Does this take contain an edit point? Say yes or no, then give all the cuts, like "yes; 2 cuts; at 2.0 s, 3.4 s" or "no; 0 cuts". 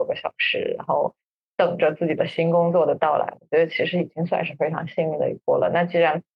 no; 0 cuts